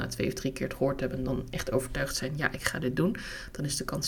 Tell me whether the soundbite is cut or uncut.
uncut